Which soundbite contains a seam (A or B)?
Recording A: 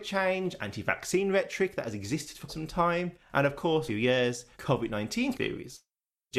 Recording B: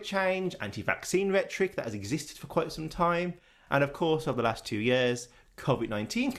A